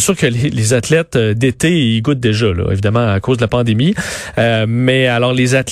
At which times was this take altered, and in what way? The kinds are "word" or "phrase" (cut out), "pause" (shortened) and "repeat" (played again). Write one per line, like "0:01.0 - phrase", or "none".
none